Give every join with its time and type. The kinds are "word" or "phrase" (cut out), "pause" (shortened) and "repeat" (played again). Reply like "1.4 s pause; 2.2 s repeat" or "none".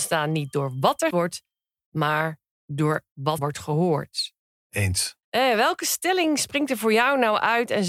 1.1 s word; 3.4 s word; 5.2 s pause

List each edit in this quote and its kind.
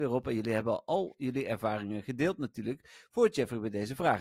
none

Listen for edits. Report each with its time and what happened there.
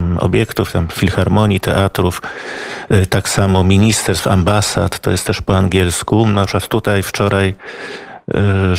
none

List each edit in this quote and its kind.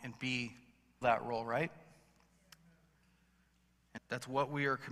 1.0 s word; 4.0 s word

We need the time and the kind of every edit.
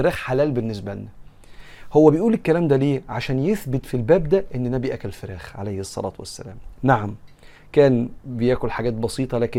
none

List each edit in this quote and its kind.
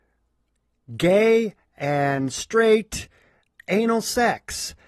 none

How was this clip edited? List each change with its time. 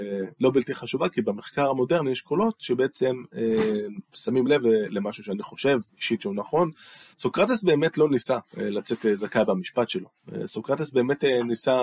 5.9 s pause; 7.1 s pause

